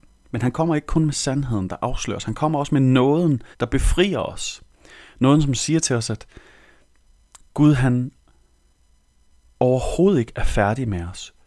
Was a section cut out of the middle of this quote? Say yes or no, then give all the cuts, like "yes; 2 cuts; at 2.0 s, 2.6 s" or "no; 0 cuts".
yes; 1 cut; at 3.5 s